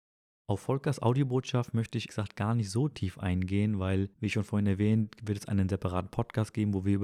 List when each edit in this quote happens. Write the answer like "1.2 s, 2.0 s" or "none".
2.1 s, 4.1 s